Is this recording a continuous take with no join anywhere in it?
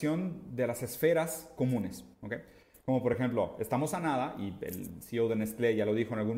yes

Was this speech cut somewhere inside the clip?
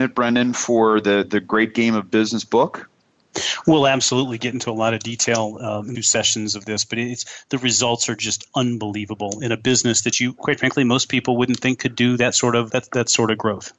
yes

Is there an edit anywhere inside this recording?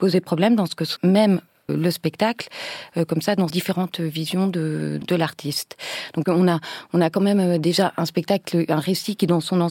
yes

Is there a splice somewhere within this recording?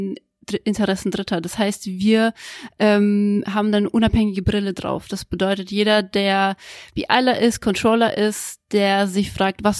no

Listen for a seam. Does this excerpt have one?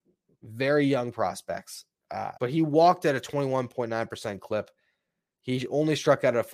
yes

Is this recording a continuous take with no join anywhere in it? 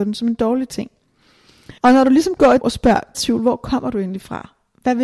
no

